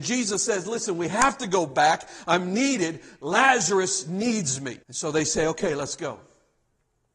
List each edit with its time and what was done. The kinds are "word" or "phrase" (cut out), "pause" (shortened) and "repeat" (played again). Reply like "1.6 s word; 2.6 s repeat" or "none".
4.8 s pause